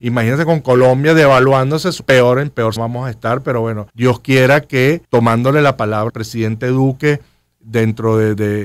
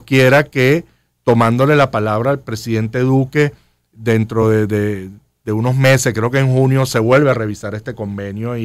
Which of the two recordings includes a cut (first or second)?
first